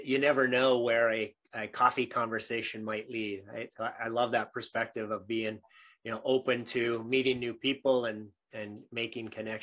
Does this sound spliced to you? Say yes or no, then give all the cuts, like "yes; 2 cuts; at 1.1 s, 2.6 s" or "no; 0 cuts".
no; 0 cuts